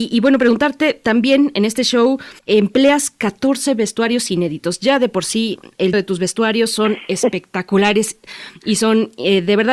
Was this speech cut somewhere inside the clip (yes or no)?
yes